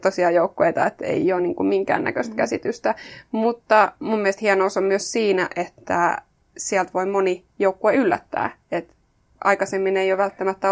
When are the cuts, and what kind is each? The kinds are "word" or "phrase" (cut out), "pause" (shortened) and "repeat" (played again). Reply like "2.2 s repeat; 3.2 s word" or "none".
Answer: none